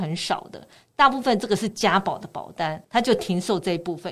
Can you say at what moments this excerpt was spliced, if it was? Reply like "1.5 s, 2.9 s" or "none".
2.8 s